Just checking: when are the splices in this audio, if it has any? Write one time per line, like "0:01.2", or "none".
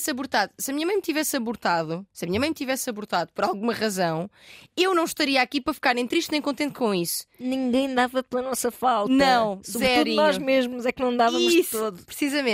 0:02.1